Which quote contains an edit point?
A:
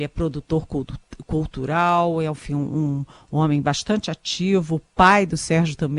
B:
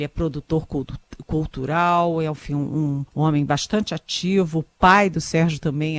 B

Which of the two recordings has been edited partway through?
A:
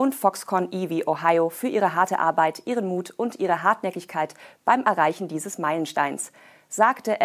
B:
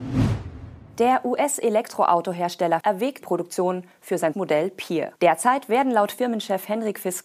B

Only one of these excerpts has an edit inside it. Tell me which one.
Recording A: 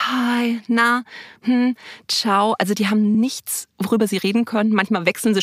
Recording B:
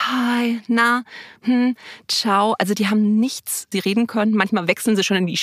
B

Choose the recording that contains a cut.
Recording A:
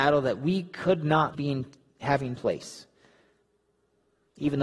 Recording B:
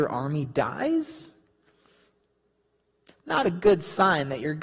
A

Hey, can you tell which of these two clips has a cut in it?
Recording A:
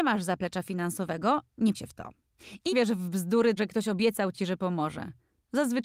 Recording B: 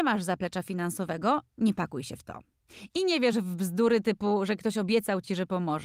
A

